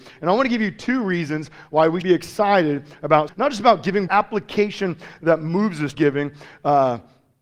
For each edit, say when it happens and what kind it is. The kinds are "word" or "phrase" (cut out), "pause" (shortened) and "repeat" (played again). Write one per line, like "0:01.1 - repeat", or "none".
0:02.0 - word
0:03.3 - word
0:04.1 - word
0:05.9 - word